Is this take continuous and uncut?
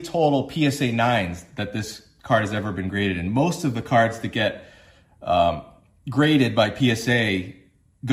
yes; 0 cuts

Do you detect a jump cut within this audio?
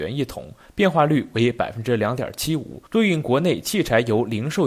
yes; 1 cut; at 2.9 s

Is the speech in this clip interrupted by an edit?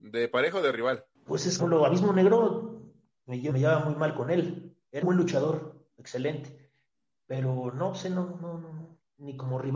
yes; 4 cuts; at 1.1 s, 1.6 s, 3.5 s, 5.0 s

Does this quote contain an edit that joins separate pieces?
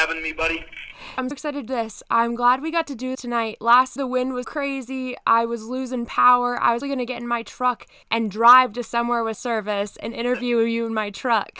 yes; 8 cuts; at 1.3 s, 1.7 s, 3.1 s, 4.0 s, 4.4 s, 6.8 s, 8.0 s, 9.3 s

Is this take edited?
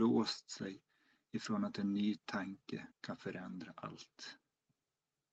yes; 1 cut; at 2.9 s

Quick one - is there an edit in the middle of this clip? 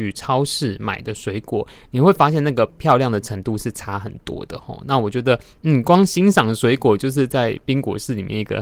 no; 0 cuts

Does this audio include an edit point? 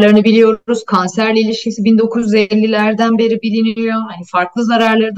no; 0 cuts

